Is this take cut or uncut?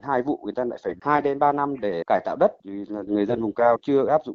uncut